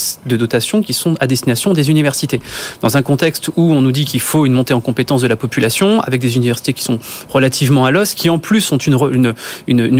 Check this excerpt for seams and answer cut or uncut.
uncut